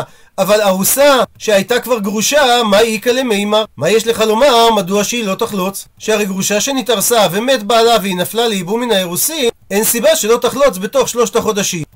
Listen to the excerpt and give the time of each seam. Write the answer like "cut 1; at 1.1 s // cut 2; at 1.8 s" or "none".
cut 1; at 3.7 s